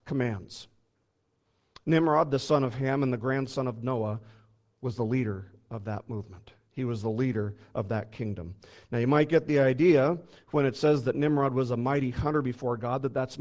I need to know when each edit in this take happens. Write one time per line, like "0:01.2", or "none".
none